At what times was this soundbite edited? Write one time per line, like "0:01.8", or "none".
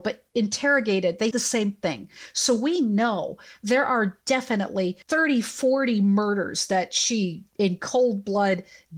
0:01.3
0:05.0

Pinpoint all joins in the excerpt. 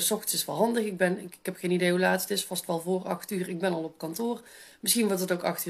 none

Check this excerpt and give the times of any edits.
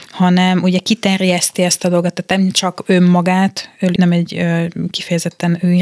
0:04.0

